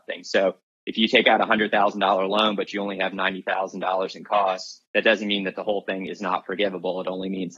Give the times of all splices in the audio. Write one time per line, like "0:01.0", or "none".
0:04.8